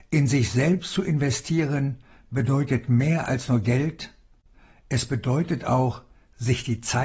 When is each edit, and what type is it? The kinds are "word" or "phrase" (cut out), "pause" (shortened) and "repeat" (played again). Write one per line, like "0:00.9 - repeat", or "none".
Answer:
none